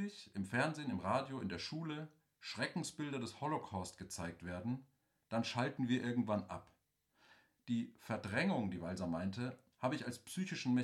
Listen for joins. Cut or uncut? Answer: uncut